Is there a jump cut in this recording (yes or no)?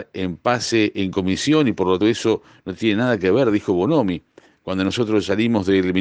yes